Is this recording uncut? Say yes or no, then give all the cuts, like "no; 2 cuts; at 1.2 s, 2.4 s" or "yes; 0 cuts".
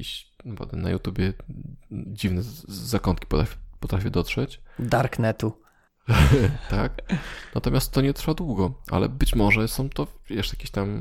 yes; 0 cuts